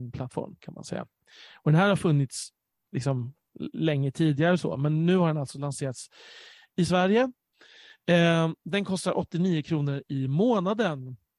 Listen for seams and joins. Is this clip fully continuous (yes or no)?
yes